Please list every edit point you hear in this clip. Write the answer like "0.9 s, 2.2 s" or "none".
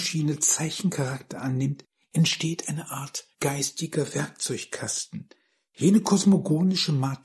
3.3 s